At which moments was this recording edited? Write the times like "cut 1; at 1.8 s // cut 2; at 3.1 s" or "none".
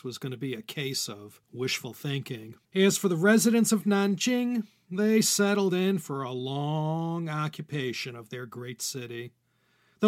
cut 1; at 1.4 s // cut 2; at 2.7 s

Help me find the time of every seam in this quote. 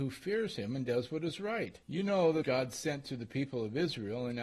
cut 1; at 1.8 s // cut 2; at 2.4 s

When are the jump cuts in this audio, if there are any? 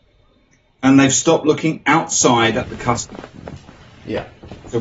none

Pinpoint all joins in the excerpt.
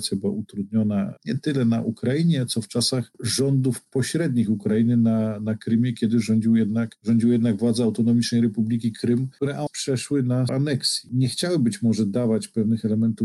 cut 1; at 9.7 s // cut 2; at 10.5 s

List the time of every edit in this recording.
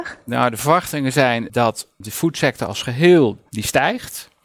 cut 1; at 3.5 s

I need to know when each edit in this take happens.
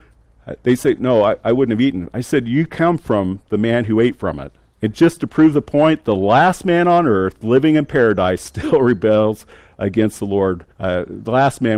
cut 1; at 9.5 s // cut 2; at 10.7 s

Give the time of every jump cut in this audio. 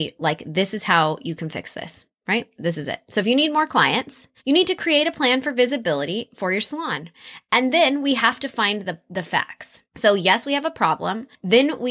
cut 1; at 4.4 s // cut 2; at 9.8 s

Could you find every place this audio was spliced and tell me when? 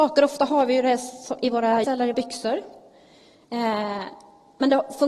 cut 1; at 1.8 s // cut 2; at 2.1 s

